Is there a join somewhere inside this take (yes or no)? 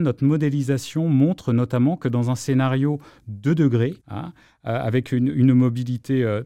yes